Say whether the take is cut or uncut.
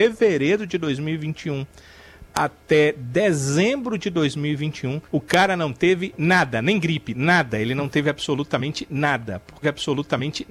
cut